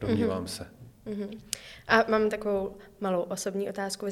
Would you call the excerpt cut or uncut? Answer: uncut